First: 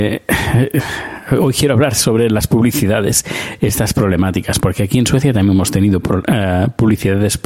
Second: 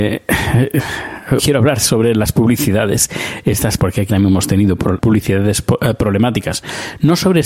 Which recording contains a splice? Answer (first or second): second